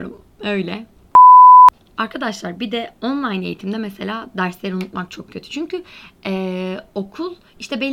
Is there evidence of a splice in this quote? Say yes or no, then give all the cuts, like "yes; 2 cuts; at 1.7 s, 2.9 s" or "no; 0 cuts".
no; 0 cuts